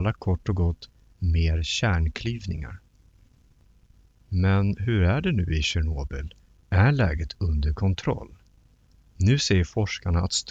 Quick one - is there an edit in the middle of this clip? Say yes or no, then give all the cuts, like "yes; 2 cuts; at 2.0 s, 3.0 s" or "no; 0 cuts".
no; 0 cuts